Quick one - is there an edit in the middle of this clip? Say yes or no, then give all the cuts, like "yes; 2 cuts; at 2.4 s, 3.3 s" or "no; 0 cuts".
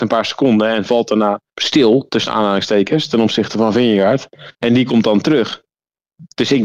yes; 2 cuts; at 1.5 s, 4.5 s